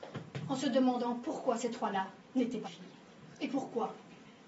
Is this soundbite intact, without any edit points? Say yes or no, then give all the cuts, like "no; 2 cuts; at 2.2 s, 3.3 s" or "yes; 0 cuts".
no; 1 cut; at 2.6 s